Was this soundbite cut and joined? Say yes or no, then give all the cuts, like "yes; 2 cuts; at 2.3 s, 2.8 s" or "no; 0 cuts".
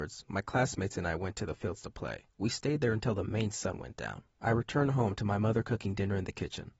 yes; 2 cuts; at 2.3 s, 4.3 s